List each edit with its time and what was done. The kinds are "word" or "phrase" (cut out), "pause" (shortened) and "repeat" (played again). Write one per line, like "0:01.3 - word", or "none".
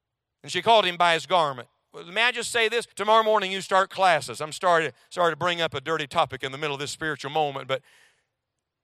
0:02.9 - pause